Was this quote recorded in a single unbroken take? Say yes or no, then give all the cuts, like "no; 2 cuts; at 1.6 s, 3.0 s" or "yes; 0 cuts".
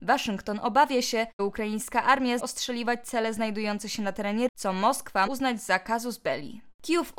no; 4 cuts; at 1.4 s, 2.4 s, 4.5 s, 5.3 s